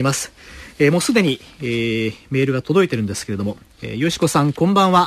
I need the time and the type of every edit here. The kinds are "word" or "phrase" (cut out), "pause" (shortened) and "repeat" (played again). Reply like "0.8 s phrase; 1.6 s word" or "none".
none